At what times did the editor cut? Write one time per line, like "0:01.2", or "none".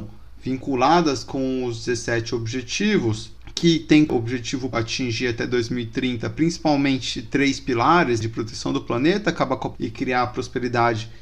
0:04.1
0:04.7
0:09.7